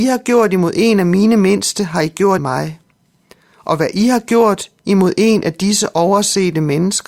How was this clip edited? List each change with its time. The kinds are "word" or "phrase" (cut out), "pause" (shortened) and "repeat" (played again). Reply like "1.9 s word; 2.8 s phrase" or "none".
2.4 s word